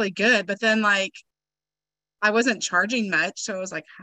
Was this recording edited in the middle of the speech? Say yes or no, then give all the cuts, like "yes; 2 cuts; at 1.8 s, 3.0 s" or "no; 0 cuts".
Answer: no; 0 cuts